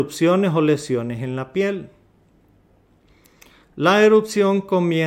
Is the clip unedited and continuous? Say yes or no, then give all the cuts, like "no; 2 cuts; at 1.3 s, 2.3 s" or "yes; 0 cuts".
yes; 0 cuts